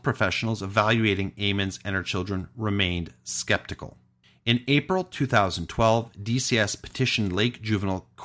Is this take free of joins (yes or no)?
yes